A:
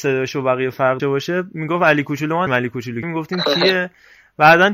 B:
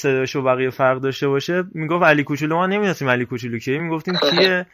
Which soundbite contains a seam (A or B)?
A